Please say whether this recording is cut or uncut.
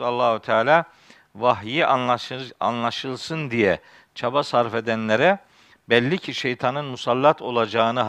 uncut